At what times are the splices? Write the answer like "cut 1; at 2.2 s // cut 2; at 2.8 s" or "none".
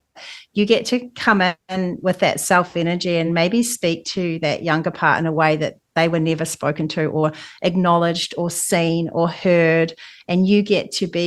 none